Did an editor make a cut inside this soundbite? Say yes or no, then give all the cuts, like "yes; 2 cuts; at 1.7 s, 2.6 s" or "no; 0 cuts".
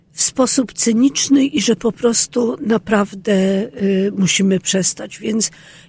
yes; 1 cut; at 1.5 s